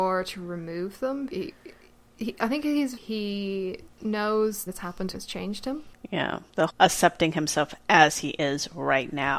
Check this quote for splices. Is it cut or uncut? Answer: cut